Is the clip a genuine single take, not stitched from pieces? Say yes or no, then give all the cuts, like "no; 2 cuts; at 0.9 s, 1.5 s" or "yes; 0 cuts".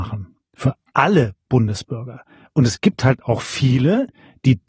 yes; 0 cuts